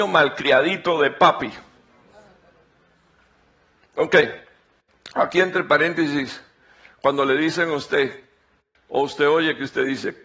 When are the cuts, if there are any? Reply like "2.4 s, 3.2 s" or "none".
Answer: none